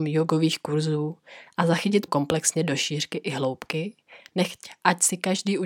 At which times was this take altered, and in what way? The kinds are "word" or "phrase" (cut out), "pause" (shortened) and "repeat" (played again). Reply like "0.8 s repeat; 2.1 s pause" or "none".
2.1 s word